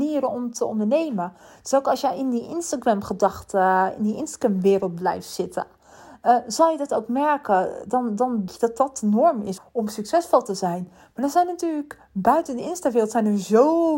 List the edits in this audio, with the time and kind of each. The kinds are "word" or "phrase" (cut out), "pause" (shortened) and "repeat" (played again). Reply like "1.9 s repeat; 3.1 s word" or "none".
8.5 s word; 9.6 s word